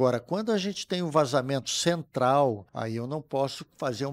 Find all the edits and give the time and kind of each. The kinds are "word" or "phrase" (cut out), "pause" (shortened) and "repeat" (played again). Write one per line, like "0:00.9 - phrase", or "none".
0:02.7 - pause